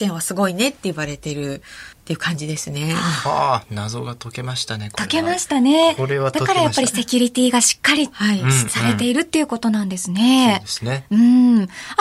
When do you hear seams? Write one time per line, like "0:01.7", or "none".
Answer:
0:01.9